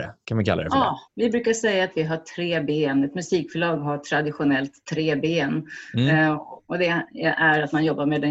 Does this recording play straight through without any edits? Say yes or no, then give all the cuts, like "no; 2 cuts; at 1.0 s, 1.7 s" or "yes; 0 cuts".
no; 1 cut; at 1.1 s